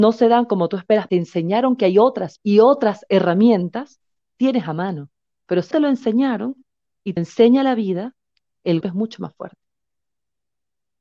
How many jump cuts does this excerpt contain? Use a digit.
6